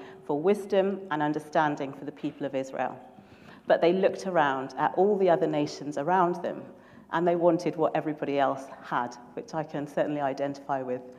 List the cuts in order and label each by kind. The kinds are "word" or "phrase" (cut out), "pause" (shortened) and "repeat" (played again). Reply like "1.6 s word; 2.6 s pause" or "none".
none